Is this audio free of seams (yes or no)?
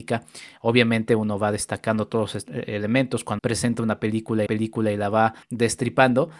no